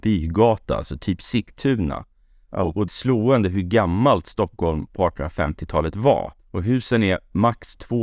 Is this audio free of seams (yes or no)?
no